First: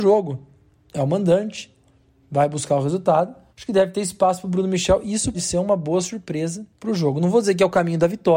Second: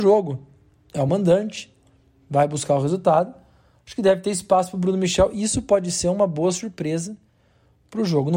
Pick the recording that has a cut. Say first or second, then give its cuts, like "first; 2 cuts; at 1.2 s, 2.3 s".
first; 3 cuts; at 3.5 s, 5.3 s, 6.7 s